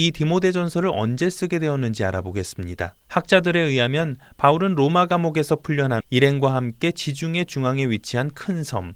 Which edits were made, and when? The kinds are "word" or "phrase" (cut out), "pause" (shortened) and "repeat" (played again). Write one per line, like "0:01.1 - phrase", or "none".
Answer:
0:03.0 - pause
0:06.0 - word